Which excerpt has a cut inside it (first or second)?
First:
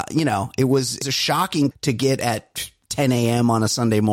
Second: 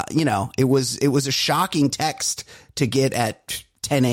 first